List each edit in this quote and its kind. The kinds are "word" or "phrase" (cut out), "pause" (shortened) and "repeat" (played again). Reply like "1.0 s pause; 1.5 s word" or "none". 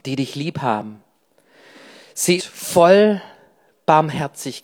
2.4 s word